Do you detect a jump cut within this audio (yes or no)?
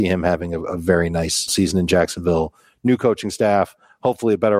yes